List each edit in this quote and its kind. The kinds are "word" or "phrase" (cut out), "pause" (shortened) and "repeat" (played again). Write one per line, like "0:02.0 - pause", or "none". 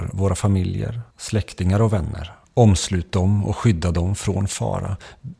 0:01.1 - pause
0:02.4 - pause